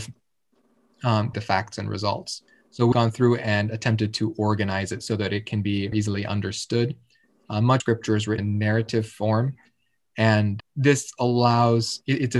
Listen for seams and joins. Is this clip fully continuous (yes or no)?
no